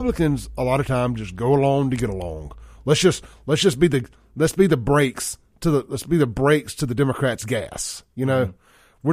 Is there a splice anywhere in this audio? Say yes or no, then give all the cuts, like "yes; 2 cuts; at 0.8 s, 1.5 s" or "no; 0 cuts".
no; 0 cuts